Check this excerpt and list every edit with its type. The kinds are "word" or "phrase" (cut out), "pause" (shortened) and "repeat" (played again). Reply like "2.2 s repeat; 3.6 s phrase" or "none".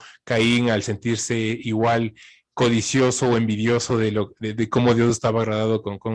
none